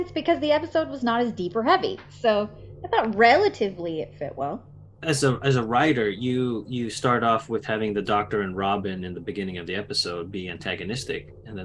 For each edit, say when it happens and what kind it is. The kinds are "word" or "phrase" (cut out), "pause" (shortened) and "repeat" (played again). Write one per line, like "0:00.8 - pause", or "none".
none